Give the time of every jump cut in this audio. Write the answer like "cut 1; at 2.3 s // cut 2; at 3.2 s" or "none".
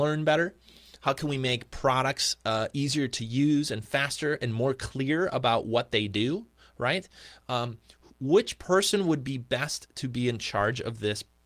none